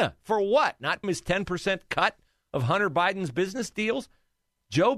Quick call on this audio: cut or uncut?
cut